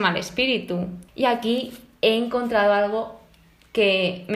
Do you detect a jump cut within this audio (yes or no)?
yes